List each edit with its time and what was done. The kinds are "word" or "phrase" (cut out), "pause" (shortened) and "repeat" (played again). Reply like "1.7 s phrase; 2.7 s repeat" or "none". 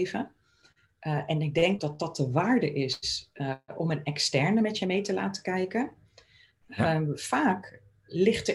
1.8 s word